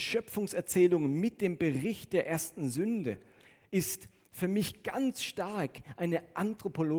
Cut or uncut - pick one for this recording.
uncut